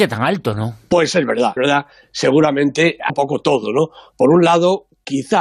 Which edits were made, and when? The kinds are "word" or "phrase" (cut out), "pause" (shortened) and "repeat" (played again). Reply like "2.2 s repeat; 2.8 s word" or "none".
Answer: 1.6 s word; 3.1 s word